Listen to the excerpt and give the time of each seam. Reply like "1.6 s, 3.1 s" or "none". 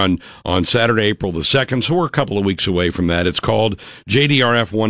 none